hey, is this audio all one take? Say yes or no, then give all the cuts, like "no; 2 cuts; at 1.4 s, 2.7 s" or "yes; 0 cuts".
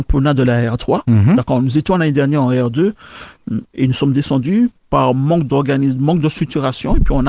yes; 0 cuts